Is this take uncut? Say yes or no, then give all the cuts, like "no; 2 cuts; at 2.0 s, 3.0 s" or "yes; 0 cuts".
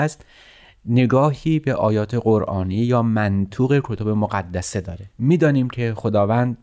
no; 1 cut; at 5.1 s